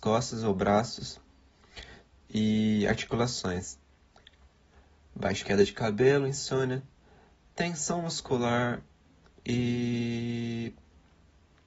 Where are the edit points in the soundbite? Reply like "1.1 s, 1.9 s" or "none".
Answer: 5.4 s